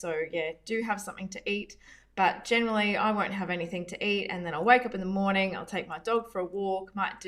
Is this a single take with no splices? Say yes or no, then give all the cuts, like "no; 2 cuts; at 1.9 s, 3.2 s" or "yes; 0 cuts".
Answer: yes; 0 cuts